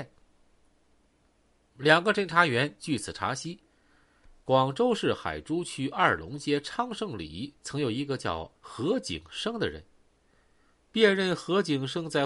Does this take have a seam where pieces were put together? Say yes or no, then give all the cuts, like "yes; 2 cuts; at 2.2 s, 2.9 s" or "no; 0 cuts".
yes; 2 cuts; at 7.6 s, 8.6 s